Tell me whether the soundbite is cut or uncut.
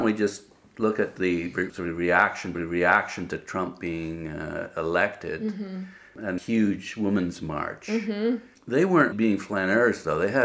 cut